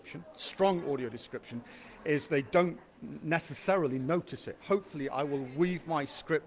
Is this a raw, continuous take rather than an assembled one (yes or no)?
no